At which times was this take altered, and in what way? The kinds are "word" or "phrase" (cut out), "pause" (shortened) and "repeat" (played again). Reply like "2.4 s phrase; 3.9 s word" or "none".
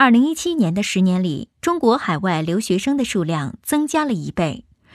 1.5 s pause

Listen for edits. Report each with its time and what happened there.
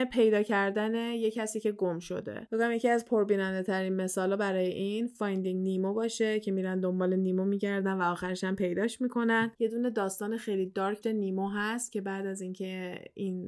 11.0 s word

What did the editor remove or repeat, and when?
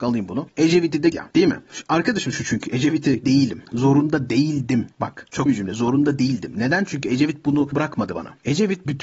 1.1 s word; 2.3 s word; 3.2 s phrase; 4.9 s pause; 5.5 s word; 7.7 s word

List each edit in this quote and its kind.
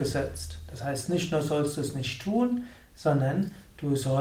none

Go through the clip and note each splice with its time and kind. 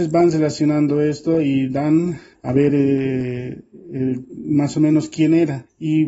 none

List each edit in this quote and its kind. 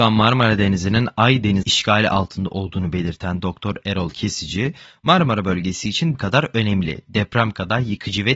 1.6 s word; 6.1 s word

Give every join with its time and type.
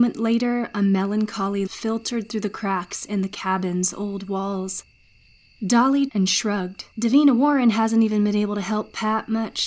1.7 s word; 6.1 s phrase; 6.9 s pause

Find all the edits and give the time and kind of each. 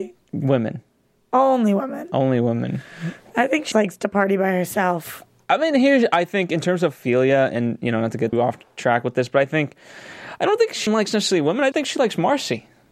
3.7 s word; 8.3 s word; 10.9 s word; 11.7 s word

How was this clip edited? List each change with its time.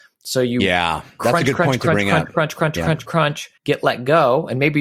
3.6 s pause

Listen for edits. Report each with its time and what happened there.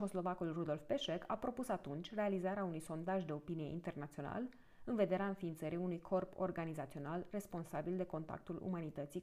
none

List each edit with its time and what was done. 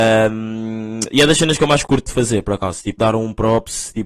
1.8 s word; 3.0 s word

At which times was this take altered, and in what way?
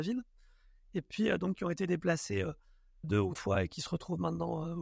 1.5 s word; 3.0 s word; 3.4 s word

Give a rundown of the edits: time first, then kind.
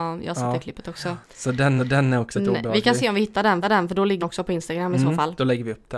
1.2 s pause; 1.8 s repeat; 2.3 s word; 3.6 s repeat; 4.2 s word

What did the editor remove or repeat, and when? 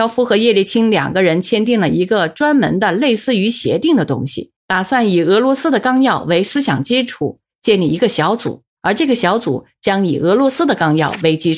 4.6 s pause; 8.7 s pause

